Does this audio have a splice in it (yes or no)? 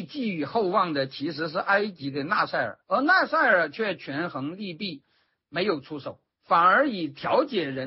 yes